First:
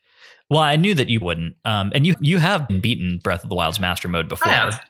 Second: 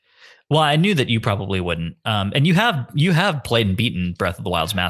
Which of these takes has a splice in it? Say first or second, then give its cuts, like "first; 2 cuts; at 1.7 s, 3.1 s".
first; 3 cuts; at 1.2 s, 2.1 s, 2.7 s